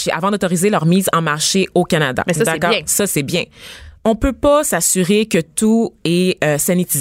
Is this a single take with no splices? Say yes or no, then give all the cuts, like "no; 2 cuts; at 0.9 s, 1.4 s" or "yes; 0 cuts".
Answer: no; 1 cut; at 4.0 s